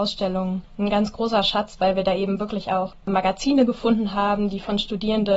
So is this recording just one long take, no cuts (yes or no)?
yes